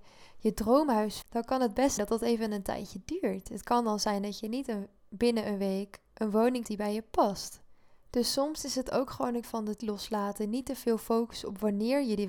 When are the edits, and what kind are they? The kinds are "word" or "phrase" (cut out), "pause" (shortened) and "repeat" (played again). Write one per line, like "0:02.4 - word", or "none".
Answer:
0:01.2 - word
0:02.0 - word
0:06.6 - word
0:09.4 - word
0:09.8 - word